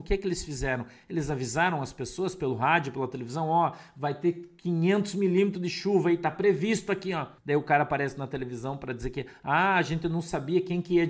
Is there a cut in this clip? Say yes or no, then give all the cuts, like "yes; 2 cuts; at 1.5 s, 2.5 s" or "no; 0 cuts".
yes; 1 cut; at 7.4 s